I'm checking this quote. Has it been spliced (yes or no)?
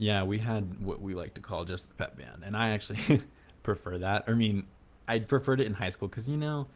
no